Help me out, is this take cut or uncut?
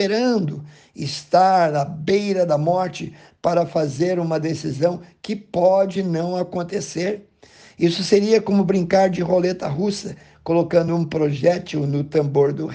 uncut